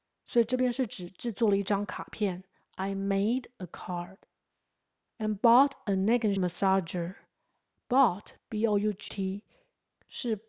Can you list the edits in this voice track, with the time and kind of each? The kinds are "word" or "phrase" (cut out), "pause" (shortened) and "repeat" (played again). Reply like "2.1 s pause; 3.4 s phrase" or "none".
6.4 s word; 9.1 s word